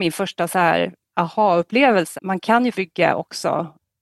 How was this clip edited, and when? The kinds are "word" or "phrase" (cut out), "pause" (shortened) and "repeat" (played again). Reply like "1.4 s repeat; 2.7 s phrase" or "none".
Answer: 2.2 s word; 2.7 s word